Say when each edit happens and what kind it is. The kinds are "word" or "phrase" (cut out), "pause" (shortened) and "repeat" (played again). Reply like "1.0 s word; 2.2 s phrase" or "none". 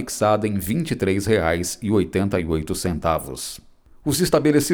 none